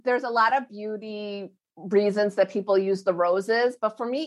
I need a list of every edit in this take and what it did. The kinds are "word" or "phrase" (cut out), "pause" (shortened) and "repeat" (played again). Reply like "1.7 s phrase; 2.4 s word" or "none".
none